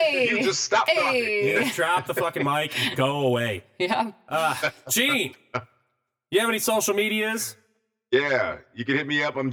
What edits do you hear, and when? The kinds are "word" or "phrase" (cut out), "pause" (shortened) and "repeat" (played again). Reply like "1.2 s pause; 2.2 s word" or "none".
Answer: none